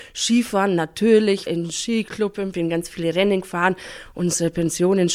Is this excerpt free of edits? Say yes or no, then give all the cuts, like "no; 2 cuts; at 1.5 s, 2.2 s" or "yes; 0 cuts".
no; 2 cuts; at 1.5 s, 2.5 s